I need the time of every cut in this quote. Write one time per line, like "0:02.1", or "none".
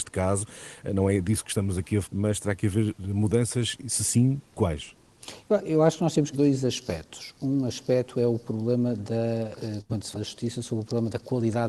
0:02.0
0:06.3
0:10.1